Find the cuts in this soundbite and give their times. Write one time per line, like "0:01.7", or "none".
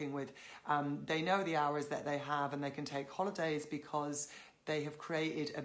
none

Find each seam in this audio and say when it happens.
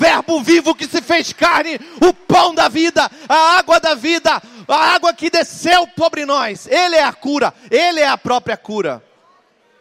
none

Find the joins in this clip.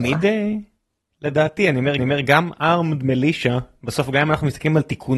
0:02.0

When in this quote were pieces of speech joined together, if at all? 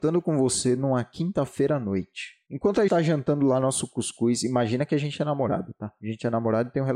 0:02.5
0:02.9

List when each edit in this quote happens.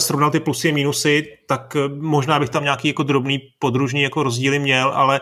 none

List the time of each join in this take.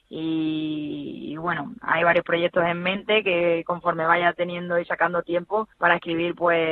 0:05.7

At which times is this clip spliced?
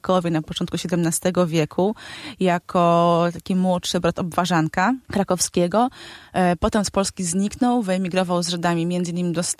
0:05.0

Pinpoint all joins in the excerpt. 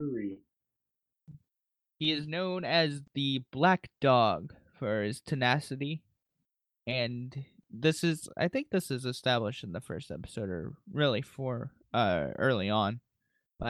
none

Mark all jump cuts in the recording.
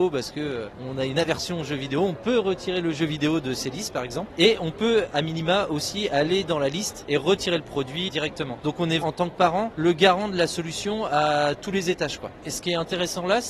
0:08.1
0:09.0

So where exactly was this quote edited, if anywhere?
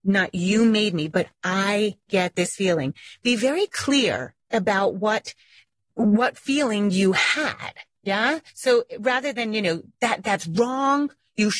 0:04.4
0:08.5

